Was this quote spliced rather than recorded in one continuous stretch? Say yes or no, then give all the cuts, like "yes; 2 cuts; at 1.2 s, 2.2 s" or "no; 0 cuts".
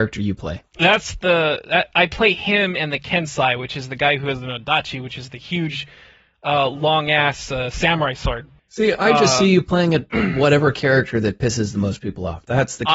yes; 1 cut; at 8.6 s